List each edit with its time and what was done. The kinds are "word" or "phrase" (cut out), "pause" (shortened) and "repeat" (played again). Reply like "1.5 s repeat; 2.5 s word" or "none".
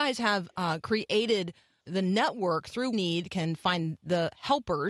1.8 s word; 2.9 s phrase